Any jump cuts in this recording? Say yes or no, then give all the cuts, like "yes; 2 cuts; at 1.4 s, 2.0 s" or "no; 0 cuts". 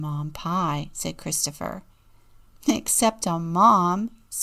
no; 0 cuts